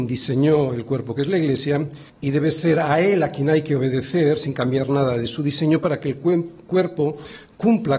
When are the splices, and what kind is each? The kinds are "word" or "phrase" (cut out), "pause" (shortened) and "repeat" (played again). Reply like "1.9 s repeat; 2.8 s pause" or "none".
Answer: 2.1 s pause